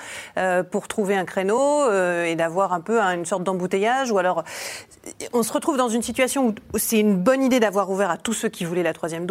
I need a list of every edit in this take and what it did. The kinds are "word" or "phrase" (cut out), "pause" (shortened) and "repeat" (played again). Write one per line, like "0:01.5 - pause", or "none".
none

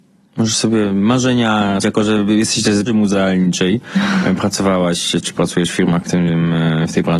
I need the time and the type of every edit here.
0:01.8 - word
0:02.9 - word
0:06.0 - word

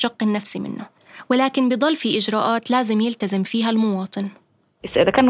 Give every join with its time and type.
none

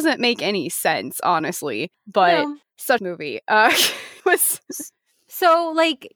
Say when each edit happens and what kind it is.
0:03.0 - phrase
0:04.2 - word

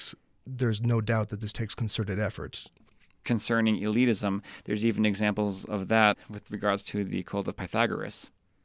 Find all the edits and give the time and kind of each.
none

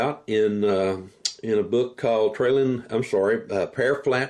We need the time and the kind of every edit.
none

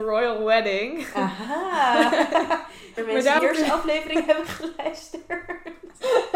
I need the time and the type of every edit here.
0:03.0 - word
0:03.4 - word

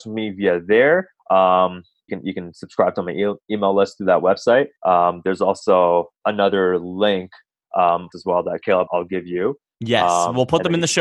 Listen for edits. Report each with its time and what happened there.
0:02.1 - phrase
0:04.8 - pause
0:06.2 - pause
0:08.1 - phrase
0:08.9 - word

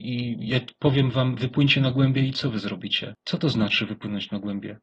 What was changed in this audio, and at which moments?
0:03.2 - pause

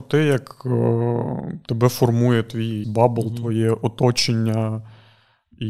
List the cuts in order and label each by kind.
0:02.8 - word

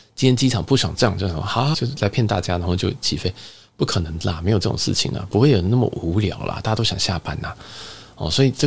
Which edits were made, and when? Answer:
0:01.7 - word

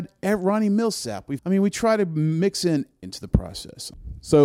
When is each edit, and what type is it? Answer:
0:01.4 - word
0:03.0 - word

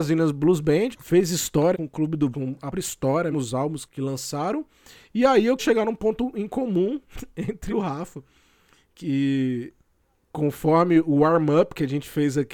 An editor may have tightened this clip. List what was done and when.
0:00.9 - word
0:01.7 - word
0:02.3 - word
0:02.7 - word
0:03.3 - word
0:03.8 - word
0:05.6 - word
0:07.7 - word

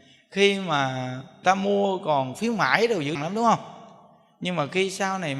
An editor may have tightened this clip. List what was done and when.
0:01.4 - word
0:03.2 - word

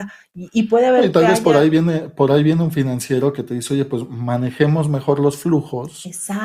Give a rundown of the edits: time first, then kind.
none

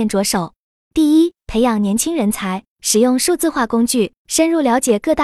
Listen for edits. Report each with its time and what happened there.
0:01.4 - pause
0:02.7 - pause
0:04.2 - pause

